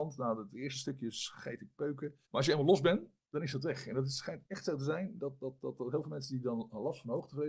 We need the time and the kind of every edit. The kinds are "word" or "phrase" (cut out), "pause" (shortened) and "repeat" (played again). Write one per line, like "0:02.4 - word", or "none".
0:02.3 - pause
0:04.5 - pause